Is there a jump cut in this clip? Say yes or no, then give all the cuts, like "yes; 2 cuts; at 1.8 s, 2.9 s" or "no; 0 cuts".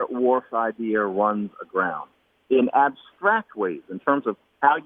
no; 0 cuts